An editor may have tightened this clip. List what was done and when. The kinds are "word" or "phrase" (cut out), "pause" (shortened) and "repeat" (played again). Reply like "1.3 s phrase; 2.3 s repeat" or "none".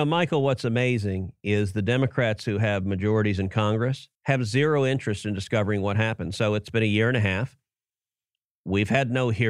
4.1 s pause